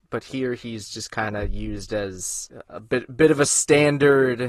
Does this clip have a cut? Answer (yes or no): no